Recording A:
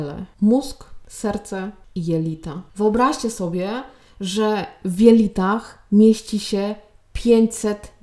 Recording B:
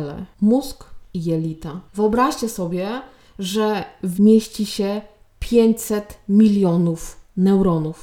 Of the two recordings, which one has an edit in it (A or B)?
B